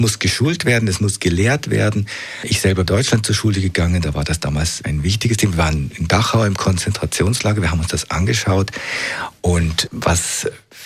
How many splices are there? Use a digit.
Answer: 2